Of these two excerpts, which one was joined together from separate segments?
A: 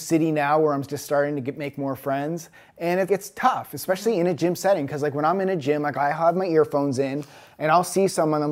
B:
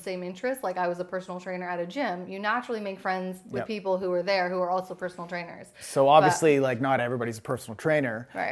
A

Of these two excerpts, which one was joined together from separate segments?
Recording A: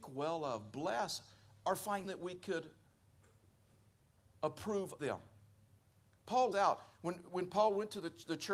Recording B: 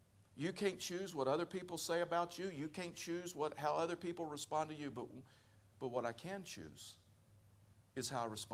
A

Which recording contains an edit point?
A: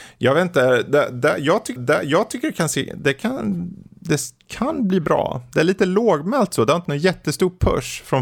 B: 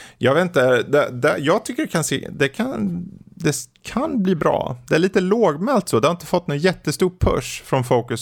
A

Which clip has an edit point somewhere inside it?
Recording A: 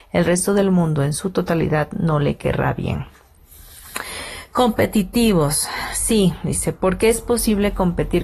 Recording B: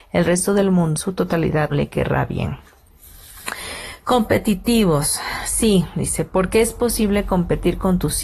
B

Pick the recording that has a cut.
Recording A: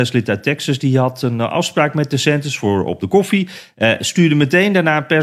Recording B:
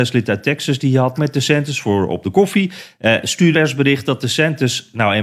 B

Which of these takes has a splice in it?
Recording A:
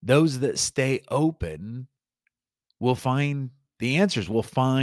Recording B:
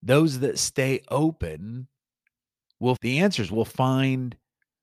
B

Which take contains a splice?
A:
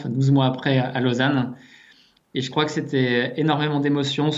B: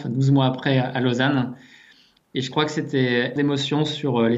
B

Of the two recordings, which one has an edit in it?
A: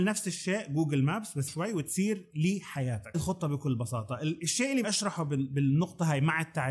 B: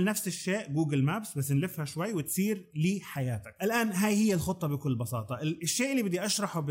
A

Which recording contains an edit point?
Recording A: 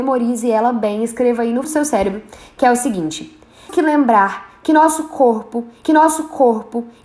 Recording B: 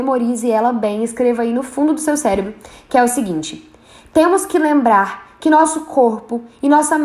A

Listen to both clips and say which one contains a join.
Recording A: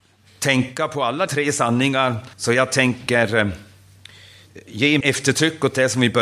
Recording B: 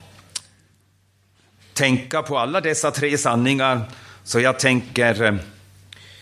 A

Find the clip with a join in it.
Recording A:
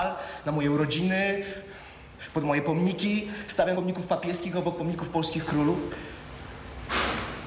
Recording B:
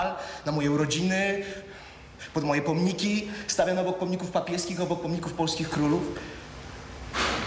A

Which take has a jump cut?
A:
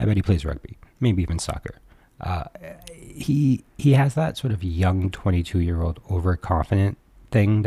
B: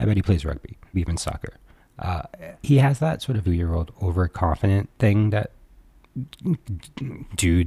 B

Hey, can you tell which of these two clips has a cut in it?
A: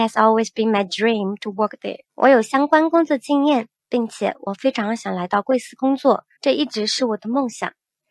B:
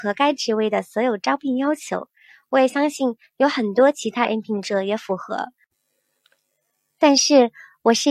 A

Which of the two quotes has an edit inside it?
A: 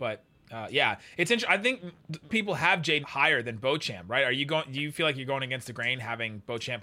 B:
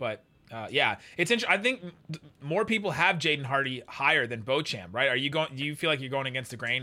A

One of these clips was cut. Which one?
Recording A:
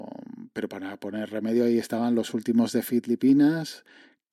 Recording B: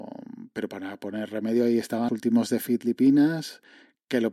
B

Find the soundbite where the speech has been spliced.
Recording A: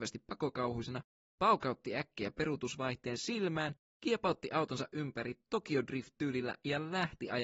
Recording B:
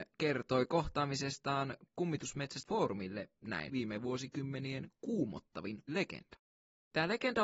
B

